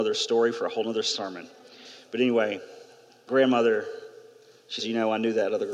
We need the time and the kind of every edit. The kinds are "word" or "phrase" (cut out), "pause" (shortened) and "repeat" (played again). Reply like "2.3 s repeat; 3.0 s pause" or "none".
3.3 s word; 4.8 s word